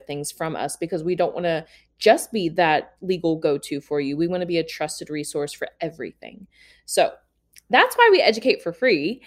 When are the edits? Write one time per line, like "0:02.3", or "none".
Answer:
none